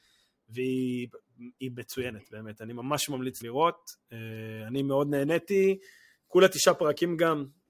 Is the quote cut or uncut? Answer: cut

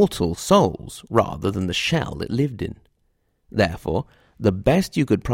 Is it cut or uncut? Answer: uncut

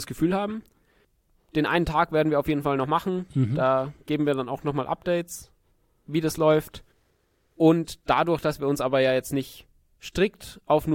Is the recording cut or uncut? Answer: uncut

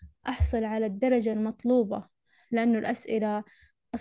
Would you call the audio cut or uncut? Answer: uncut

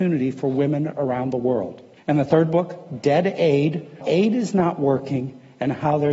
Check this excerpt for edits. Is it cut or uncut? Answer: cut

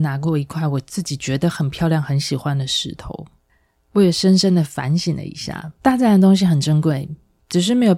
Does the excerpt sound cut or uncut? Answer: cut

